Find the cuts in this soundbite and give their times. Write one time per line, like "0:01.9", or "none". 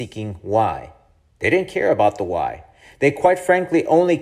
none